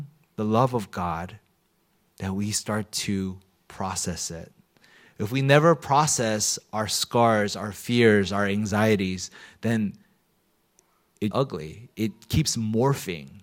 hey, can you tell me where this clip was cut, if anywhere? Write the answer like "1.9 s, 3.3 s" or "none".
11.3 s

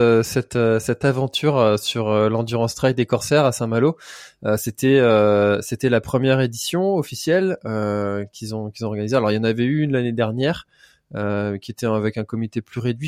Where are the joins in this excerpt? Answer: none

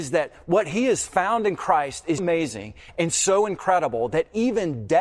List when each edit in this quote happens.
2.2 s

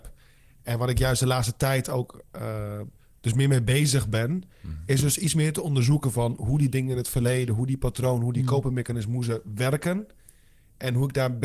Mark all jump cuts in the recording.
none

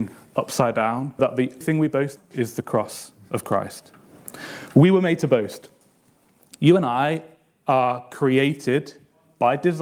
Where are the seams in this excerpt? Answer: 1.2 s, 1.6 s, 2.2 s

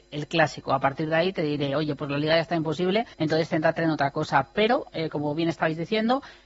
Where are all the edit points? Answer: 3.1 s

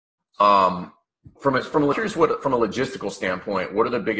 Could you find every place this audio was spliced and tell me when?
1.4 s, 1.9 s

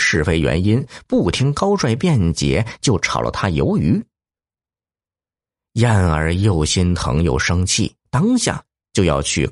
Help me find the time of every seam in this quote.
8.0 s

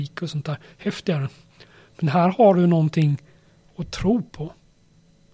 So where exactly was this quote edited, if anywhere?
none

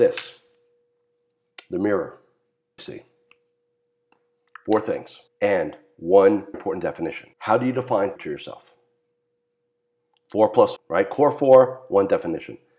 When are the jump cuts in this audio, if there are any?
2.8 s, 5.3 s, 6.5 s, 7.3 s, 8.2 s, 10.8 s

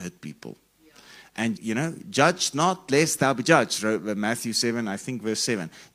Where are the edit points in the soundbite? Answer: 1.6 s

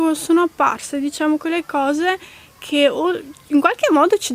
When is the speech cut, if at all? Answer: none

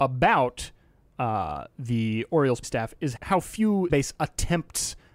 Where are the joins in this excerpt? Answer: 2.6 s, 3.2 s, 3.9 s

